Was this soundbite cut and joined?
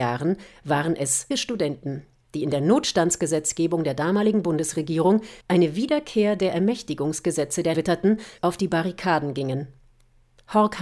yes; 4 cuts; at 1.3 s, 5.4 s, 7.7 s, 8.4 s

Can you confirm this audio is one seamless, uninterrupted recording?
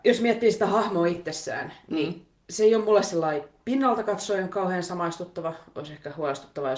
yes; 0 cuts

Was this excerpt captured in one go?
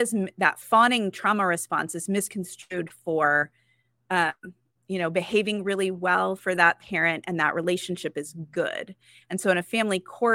yes; 0 cuts

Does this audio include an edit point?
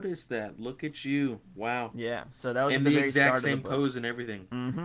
no; 0 cuts

